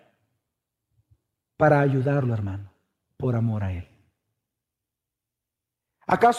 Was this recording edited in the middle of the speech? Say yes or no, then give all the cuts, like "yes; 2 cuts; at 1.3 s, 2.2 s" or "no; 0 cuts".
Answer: no; 0 cuts